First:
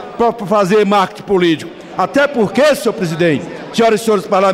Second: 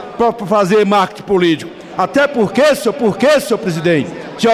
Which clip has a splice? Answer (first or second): second